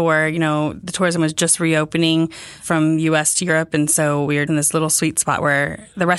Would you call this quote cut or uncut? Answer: cut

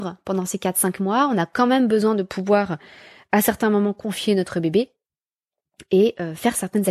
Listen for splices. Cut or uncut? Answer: uncut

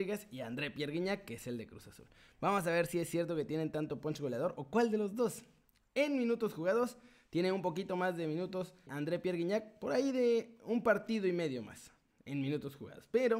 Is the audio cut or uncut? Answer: cut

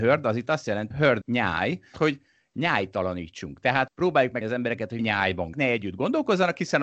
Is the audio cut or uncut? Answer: cut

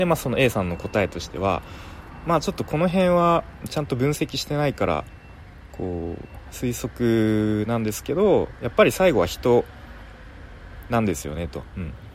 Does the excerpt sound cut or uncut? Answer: uncut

